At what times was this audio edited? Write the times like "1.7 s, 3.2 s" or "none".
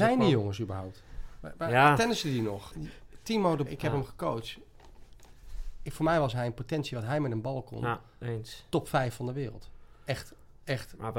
3.7 s